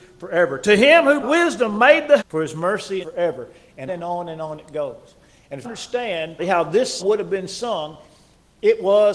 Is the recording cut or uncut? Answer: cut